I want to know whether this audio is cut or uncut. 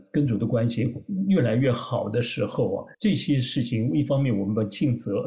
cut